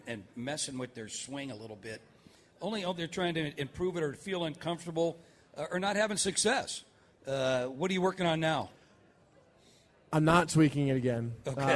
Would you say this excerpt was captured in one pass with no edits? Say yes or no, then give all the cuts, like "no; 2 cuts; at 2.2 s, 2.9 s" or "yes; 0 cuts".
yes; 0 cuts